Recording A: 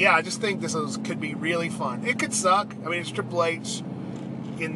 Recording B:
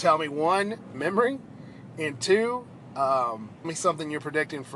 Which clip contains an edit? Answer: B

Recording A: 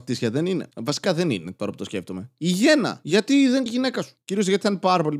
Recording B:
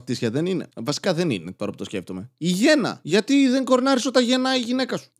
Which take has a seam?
A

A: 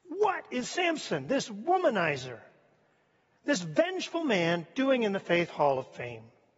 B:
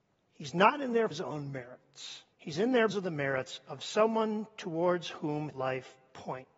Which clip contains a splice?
B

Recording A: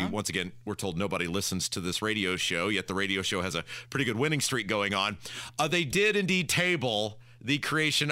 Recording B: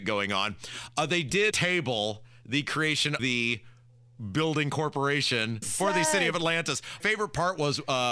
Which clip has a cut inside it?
B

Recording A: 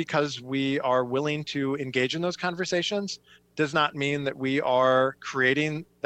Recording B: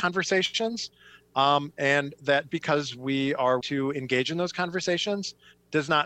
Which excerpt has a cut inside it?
B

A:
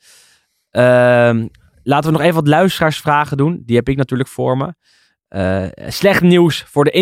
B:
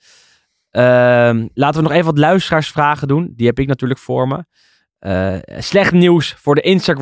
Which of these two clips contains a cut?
B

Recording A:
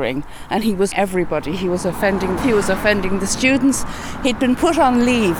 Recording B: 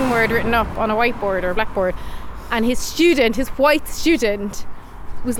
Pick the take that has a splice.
A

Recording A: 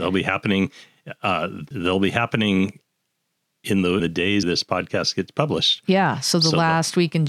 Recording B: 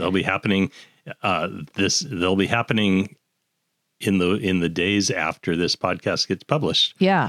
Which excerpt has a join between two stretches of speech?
A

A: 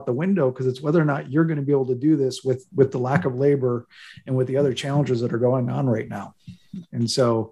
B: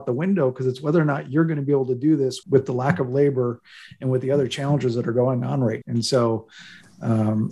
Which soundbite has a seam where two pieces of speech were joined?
B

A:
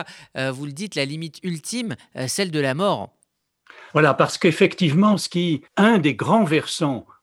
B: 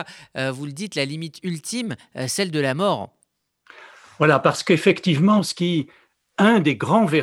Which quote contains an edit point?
A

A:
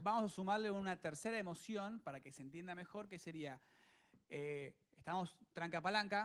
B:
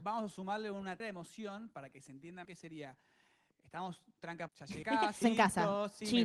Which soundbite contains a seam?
B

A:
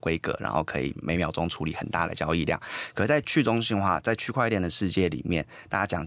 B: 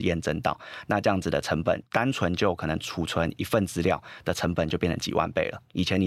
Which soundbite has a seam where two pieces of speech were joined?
B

